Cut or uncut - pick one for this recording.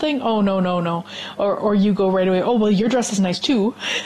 uncut